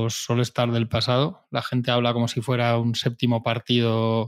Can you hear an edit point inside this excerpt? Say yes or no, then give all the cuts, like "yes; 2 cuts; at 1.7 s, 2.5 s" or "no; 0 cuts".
no; 0 cuts